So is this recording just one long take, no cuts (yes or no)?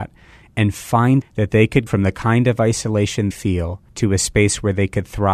no